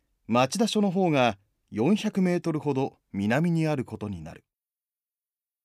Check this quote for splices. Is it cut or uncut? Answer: uncut